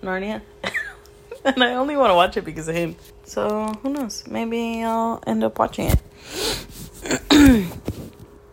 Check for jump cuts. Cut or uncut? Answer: cut